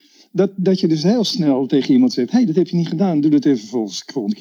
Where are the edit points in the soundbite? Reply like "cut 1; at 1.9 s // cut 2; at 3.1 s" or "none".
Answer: none